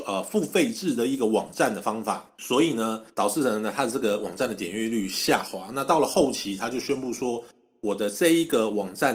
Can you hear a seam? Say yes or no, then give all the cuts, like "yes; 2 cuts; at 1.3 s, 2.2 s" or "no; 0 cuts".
yes; 2 cuts; at 2.3 s, 3.1 s